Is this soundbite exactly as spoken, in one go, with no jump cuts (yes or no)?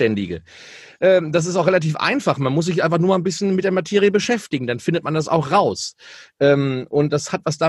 yes